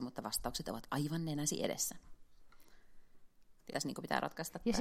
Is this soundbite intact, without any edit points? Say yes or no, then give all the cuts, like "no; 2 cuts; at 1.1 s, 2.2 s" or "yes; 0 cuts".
no; 1 cut; at 3.7 s